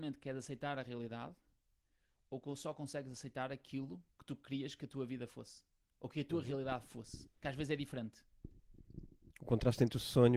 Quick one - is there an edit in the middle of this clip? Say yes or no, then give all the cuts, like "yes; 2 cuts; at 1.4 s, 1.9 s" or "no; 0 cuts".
no; 0 cuts